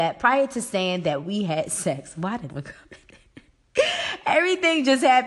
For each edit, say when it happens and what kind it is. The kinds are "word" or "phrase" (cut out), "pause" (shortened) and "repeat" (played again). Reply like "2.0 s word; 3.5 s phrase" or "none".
2.5 s phrase